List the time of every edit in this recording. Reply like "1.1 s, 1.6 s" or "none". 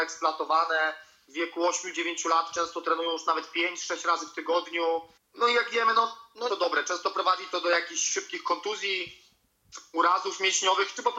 5.2 s, 6.5 s